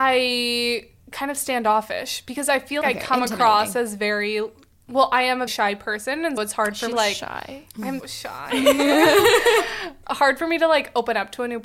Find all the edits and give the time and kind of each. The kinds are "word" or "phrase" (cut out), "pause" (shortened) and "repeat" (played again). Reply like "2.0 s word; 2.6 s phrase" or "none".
2.8 s word; 5.5 s word; 6.4 s word; 6.9 s phrase; 8.0 s word; 10.0 s phrase